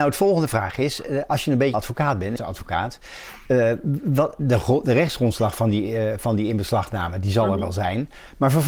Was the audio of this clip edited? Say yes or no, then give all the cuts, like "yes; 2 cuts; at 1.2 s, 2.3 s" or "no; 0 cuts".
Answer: yes; 2 cuts; at 1.7 s, 2.4 s